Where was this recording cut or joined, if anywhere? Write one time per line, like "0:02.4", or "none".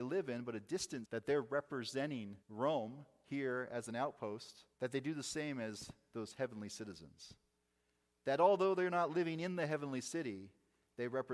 0:01.0
0:02.4
0:04.7